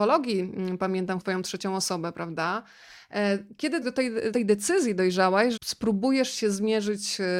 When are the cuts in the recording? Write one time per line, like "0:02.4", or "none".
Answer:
0:01.2
0:03.8
0:04.3
0:05.6

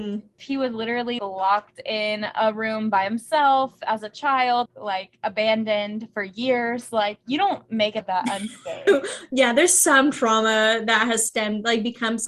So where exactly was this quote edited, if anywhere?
0:01.2
0:04.7
0:08.0

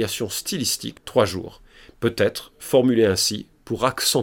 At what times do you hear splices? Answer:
0:01.0

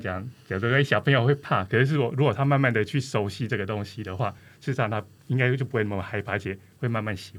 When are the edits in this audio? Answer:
none

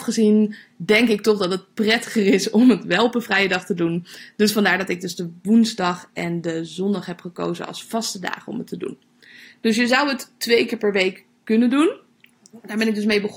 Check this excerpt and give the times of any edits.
none

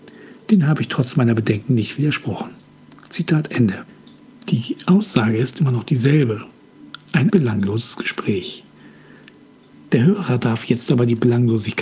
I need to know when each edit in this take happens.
0:07.3

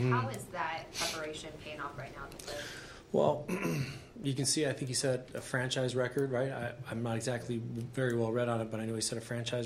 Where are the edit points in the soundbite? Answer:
none

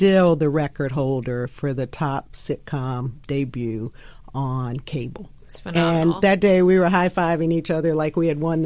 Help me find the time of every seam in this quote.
none

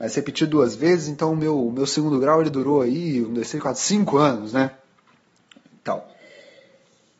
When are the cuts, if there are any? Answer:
none

